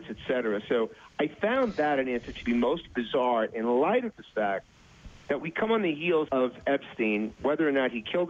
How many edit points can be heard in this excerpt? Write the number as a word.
two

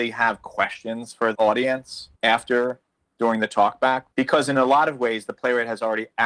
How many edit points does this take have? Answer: three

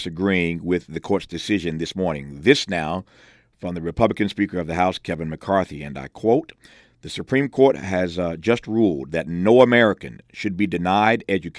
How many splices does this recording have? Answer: zero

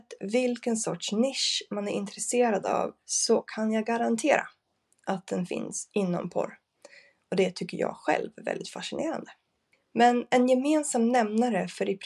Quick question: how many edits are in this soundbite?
zero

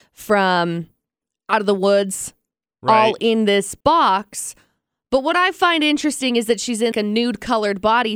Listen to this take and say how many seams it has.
two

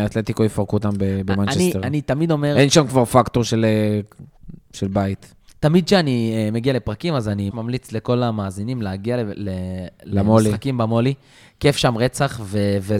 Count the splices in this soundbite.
one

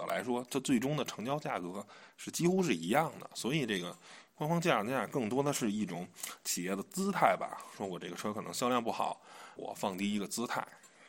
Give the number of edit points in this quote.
one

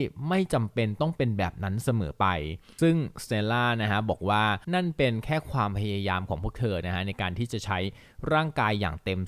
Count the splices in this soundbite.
one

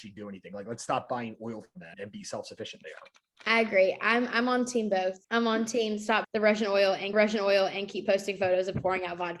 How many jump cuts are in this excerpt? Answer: four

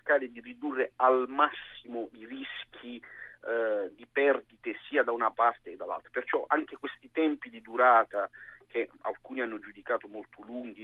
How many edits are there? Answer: zero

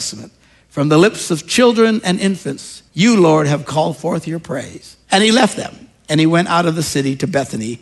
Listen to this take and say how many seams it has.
two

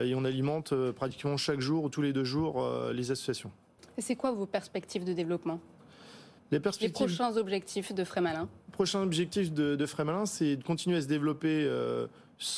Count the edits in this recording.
one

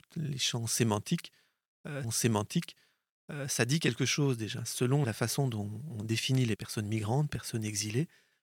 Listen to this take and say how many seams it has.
three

